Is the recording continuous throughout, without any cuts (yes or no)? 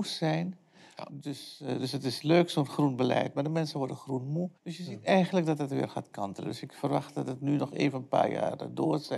no